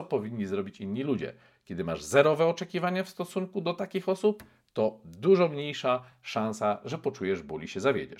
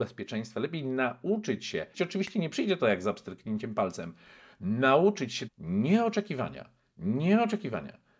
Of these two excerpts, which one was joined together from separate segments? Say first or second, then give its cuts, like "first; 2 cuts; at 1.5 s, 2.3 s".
second; 2 cuts; at 1.9 s, 5.5 s